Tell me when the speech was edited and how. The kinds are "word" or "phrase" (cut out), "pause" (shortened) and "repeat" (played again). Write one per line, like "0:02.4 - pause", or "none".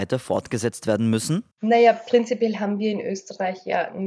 0:01.5 - pause

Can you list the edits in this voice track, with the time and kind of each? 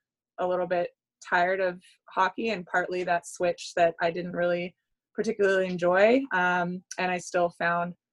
none

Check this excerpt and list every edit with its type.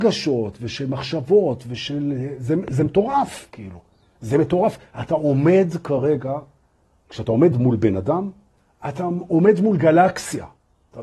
none

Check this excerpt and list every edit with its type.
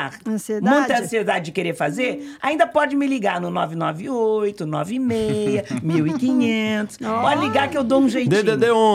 none

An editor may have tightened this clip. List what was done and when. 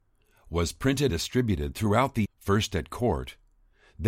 0:01.1 - word
0:02.2 - word

